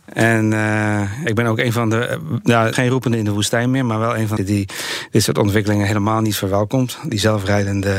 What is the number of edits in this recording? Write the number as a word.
three